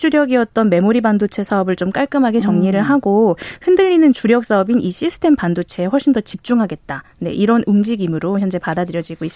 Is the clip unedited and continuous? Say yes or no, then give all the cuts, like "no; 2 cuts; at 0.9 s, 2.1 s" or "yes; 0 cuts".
no; 1 cut; at 7.1 s